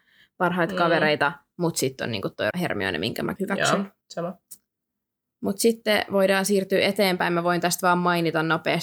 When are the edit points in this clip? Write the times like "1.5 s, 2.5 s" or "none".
2.5 s, 3.4 s, 4.0 s